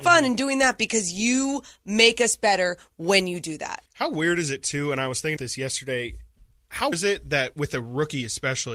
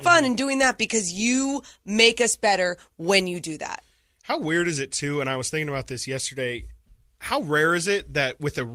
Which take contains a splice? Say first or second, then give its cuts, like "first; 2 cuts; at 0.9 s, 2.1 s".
first; 3 cuts; at 3.9 s, 5.4 s, 6.9 s